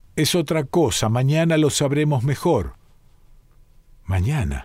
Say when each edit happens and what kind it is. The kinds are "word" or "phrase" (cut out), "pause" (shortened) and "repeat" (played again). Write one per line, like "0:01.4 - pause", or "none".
none